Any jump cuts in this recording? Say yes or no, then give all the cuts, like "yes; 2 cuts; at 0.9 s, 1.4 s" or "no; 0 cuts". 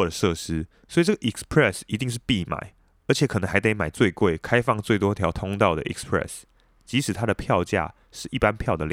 no; 0 cuts